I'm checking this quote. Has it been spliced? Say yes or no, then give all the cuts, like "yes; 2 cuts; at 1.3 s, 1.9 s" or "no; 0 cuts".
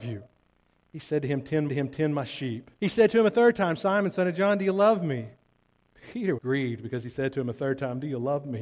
yes; 3 cuts; at 1.7 s, 2.8 s, 6.4 s